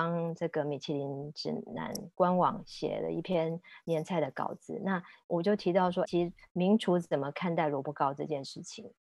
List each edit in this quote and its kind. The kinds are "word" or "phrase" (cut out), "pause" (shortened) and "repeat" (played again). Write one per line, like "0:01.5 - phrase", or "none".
0:06.1 - word

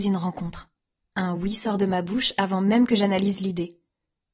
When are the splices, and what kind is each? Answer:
none

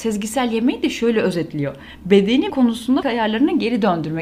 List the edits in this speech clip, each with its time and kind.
0:02.5 - word
0:03.0 - word

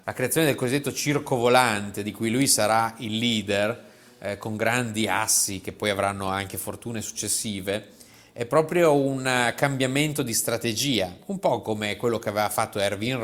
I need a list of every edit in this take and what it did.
none

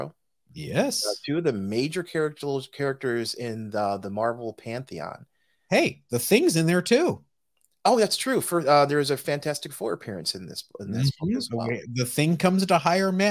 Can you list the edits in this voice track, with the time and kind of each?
none

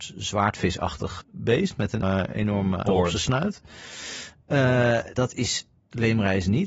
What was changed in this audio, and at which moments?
0:01.2 - word
0:02.0 - word
0:02.9 - word
0:05.1 - word

